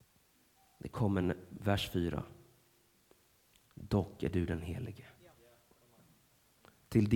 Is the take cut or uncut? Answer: uncut